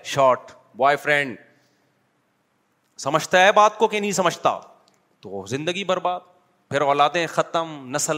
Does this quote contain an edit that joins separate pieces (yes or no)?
no